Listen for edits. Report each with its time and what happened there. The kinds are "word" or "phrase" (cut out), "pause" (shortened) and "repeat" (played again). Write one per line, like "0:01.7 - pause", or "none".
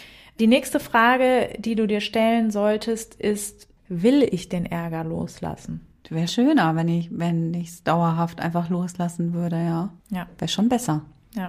0:06.3 - word
0:10.0 - pause